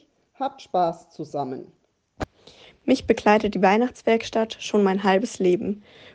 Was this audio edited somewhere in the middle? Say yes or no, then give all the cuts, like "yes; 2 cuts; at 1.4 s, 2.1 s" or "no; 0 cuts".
no; 0 cuts